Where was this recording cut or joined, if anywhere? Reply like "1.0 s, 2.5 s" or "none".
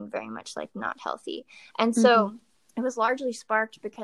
2.5 s